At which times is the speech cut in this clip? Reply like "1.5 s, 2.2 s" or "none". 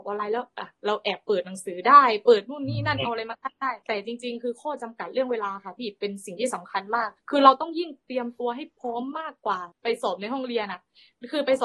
3.8 s, 7.2 s, 9.7 s